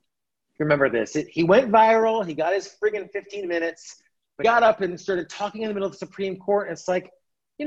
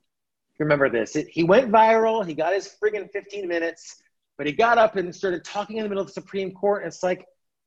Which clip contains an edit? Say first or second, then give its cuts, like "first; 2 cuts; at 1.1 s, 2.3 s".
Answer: first; 1 cut; at 4.4 s